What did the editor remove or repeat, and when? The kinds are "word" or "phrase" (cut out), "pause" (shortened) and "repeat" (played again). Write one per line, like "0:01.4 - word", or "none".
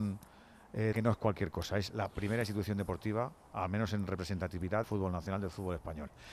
0:00.9 - word
0:04.8 - word